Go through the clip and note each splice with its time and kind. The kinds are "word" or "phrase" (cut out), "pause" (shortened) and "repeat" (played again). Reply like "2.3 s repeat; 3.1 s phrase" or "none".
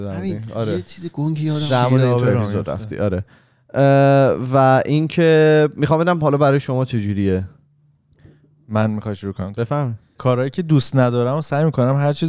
10.2 s word